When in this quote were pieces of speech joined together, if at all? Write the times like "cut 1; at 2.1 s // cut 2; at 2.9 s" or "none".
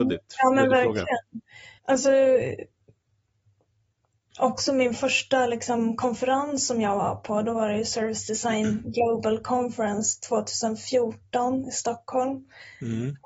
cut 1; at 1.8 s